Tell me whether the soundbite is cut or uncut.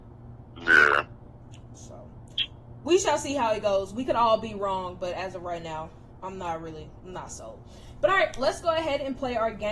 uncut